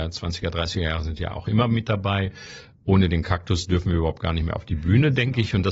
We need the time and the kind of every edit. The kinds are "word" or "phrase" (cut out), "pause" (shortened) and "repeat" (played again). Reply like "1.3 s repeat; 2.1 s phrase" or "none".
none